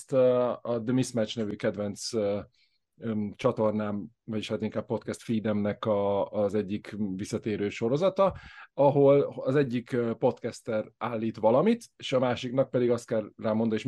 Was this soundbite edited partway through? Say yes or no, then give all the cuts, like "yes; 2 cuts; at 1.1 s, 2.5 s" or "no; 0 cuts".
no; 0 cuts